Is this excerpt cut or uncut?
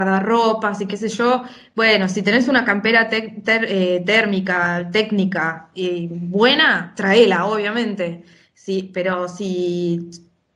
uncut